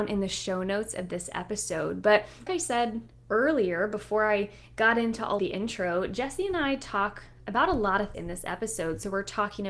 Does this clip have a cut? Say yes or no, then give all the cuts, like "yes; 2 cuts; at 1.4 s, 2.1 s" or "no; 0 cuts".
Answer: yes; 3 cuts; at 2.5 s, 5.4 s, 8.1 s